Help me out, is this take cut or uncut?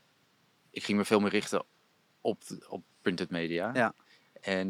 uncut